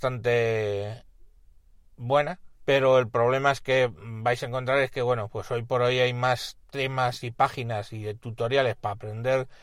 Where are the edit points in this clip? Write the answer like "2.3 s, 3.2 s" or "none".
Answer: 2.6 s, 6.6 s